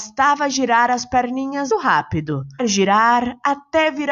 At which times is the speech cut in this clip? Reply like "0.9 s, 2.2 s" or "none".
1.7 s, 2.6 s